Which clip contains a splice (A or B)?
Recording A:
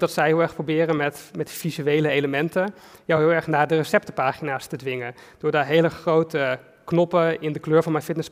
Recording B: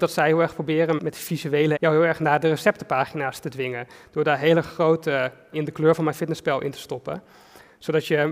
B